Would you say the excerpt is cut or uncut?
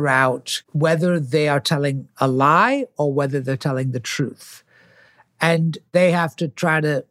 uncut